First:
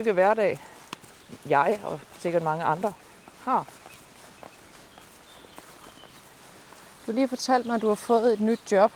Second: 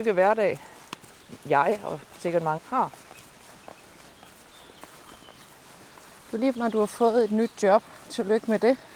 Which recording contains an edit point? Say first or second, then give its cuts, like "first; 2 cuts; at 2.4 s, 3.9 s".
second; 2 cuts; at 2.6 s, 6.5 s